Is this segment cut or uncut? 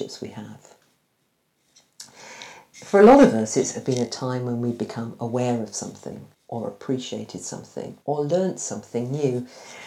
cut